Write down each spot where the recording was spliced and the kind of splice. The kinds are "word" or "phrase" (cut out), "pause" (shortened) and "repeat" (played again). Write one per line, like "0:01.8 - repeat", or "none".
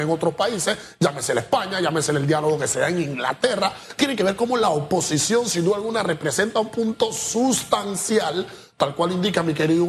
none